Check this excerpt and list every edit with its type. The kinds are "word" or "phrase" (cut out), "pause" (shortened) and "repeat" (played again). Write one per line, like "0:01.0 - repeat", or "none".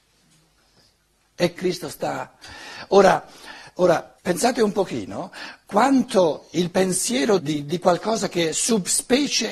0:01.6 - phrase
0:04.2 - pause
0:07.4 - word